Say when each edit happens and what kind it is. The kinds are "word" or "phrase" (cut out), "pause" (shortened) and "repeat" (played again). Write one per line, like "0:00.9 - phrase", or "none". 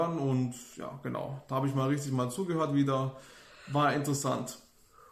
none